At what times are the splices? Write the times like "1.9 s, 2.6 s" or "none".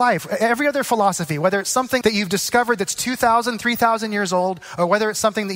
2.0 s

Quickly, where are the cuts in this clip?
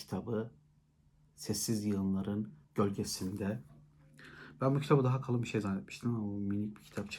2.6 s

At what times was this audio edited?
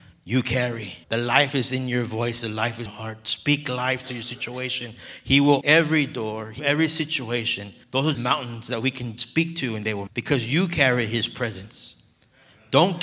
1.0 s, 2.9 s, 5.6 s, 6.6 s, 7.8 s, 8.1 s, 9.2 s, 10.1 s

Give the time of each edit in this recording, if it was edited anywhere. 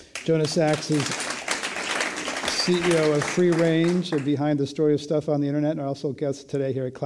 1.1 s

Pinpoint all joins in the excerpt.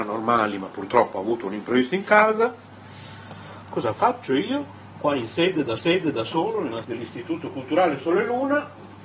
5.8 s, 6.8 s

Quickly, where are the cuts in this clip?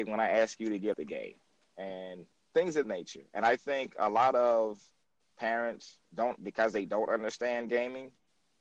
0.9 s, 2.3 s, 2.8 s, 6.4 s

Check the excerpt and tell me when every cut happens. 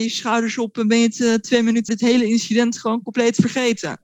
1.9 s

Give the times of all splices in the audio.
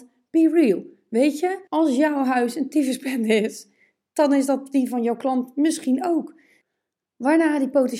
1.7 s

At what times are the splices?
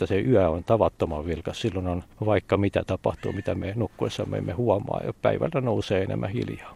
2.1 s

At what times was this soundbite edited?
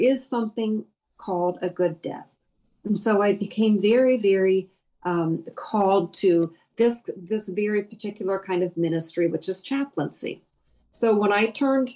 none

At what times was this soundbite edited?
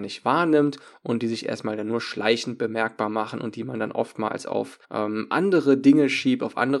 4.8 s

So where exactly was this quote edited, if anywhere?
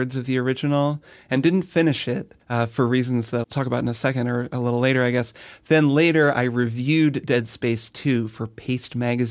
2.4 s, 3.4 s

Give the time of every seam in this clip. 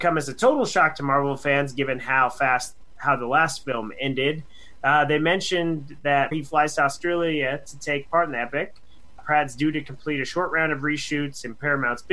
6.3 s, 9.2 s

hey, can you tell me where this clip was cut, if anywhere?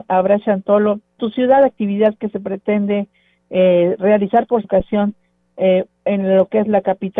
1.2 s, 4.6 s

